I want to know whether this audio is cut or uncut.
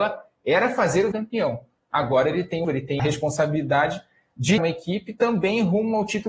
cut